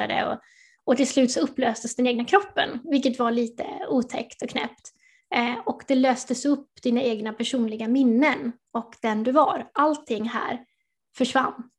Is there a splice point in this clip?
no; 0 cuts

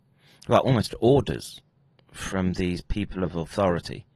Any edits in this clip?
no; 0 cuts

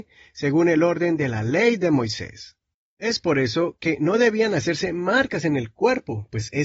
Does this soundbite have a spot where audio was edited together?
yes; 1 cut; at 2.7 s

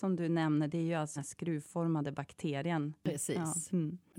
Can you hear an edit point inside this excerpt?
yes; 1 cut; at 1.2 s

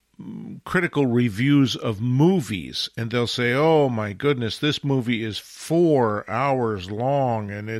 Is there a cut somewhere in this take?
no; 0 cuts

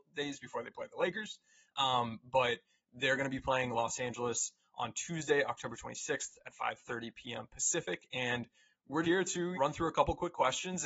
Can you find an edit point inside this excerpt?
yes; 2 cuts; at 9.0 s, 9.5 s

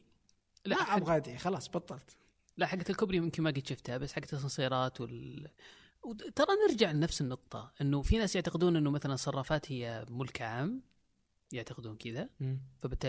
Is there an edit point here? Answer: no; 0 cuts

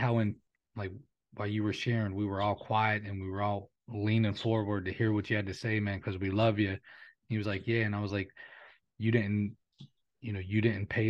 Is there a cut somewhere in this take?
no; 0 cuts

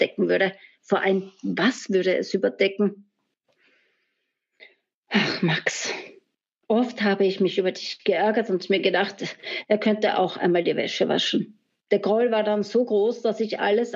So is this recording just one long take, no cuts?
yes; 0 cuts

